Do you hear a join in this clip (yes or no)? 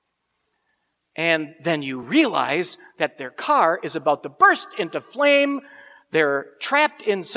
no